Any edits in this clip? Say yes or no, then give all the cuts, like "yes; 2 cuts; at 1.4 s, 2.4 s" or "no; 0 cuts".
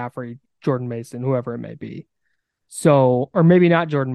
no; 0 cuts